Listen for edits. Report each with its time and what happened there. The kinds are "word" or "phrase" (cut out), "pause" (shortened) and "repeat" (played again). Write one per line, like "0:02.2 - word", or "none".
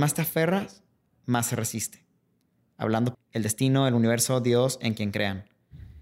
0:03.1 - word